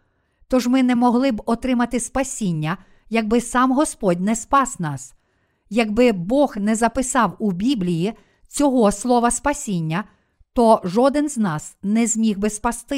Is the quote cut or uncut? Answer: uncut